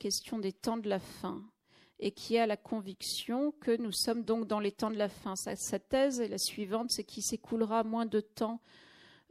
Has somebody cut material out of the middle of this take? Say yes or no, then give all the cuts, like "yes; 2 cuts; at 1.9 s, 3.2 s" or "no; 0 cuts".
no; 0 cuts